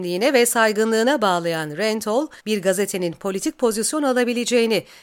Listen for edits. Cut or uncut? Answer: cut